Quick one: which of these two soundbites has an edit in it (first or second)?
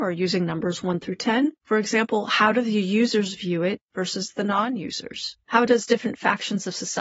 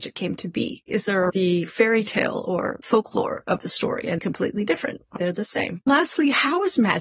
second